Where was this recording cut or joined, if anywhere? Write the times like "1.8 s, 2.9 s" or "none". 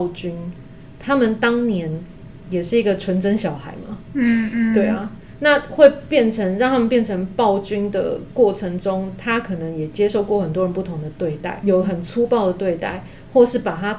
11.6 s